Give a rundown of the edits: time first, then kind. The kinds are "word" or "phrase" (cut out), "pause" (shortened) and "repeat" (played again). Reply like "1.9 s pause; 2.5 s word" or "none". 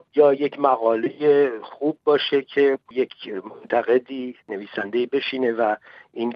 4.4 s pause